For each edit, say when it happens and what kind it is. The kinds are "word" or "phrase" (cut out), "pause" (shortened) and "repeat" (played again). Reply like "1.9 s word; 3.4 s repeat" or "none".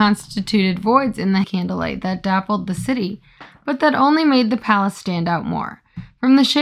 1.4 s word